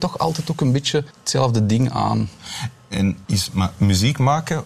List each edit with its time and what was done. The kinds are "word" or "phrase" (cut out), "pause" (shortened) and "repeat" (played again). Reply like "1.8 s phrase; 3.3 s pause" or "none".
1.1 s pause; 3.2 s pause; 3.8 s word